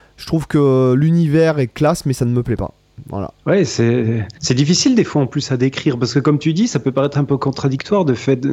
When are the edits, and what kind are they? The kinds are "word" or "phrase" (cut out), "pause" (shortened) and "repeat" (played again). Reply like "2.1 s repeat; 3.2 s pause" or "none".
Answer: 3.4 s pause; 4.4 s pause